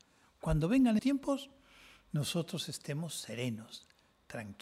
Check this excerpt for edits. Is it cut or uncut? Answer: cut